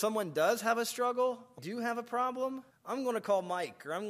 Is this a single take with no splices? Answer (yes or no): no